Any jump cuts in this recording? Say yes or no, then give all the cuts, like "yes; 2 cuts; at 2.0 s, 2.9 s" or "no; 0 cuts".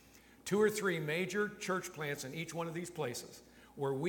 no; 0 cuts